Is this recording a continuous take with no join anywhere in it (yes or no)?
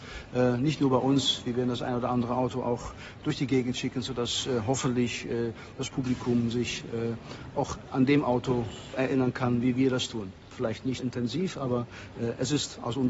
no